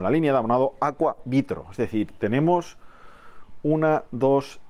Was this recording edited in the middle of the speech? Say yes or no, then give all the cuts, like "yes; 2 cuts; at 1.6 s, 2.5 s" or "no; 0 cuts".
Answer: no; 0 cuts